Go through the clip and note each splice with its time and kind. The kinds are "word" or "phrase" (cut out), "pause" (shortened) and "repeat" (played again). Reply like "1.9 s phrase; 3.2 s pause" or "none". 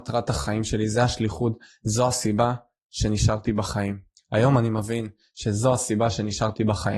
none